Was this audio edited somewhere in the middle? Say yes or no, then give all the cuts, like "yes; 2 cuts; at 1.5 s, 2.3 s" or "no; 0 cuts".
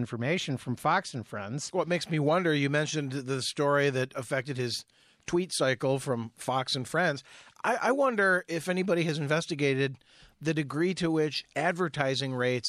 no; 0 cuts